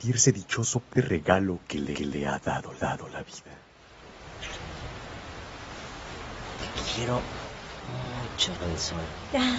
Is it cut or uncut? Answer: cut